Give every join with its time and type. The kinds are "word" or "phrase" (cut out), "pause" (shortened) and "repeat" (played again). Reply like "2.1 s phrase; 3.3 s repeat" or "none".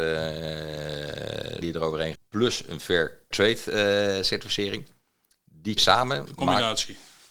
1.6 s word; 2.1 s word; 3.3 s word; 5.8 s word